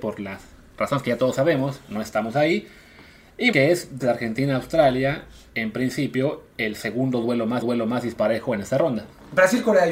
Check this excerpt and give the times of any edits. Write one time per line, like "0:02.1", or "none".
0:03.5
0:04.0
0:07.6

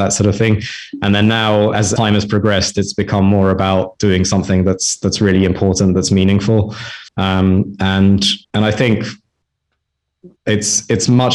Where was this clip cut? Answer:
0:02.0
0:07.1
0:08.4
0:10.4

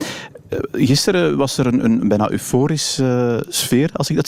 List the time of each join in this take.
none

